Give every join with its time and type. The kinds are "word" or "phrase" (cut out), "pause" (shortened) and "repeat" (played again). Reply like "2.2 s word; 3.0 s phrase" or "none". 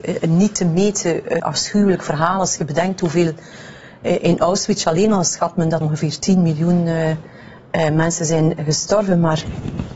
1.4 s word; 5.8 s word